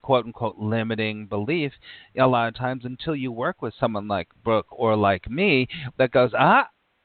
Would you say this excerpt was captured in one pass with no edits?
yes; 0 cuts

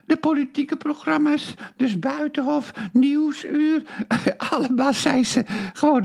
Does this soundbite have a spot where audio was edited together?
no; 0 cuts

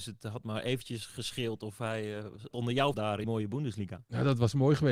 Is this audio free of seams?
no; 3 cuts; at 2.5 s, 2.9 s, 3.2 s

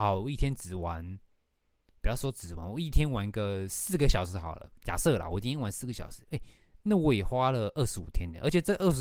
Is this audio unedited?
yes; 0 cuts

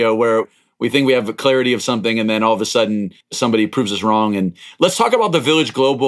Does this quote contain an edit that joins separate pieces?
yes; 1 cut; at 3.2 s

